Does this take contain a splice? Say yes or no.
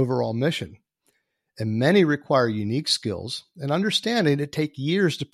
no